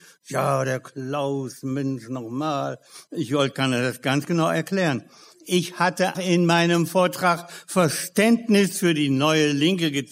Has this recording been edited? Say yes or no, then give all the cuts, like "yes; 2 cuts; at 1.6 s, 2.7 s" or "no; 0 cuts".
yes; 1 cut; at 6.1 s